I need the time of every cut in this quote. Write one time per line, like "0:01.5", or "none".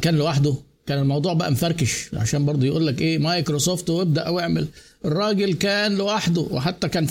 0:04.2